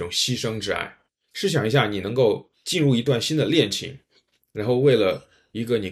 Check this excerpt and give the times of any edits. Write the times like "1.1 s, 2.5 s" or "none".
1.1 s, 2.5 s